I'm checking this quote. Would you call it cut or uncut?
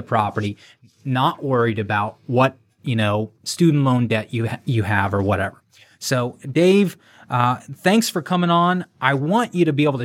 uncut